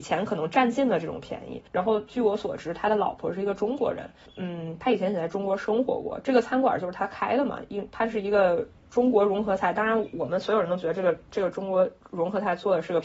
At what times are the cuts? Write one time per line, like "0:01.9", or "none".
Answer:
0:01.7
0:04.3